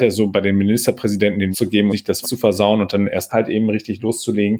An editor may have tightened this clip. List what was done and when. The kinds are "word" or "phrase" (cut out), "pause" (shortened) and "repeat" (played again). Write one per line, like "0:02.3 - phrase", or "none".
0:01.5 - word
0:01.9 - word
0:02.2 - word
0:03.3 - word